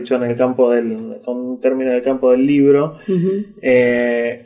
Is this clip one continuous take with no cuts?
yes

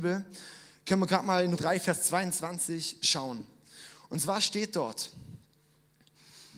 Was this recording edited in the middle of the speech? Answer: yes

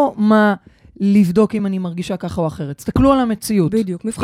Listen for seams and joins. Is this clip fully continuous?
yes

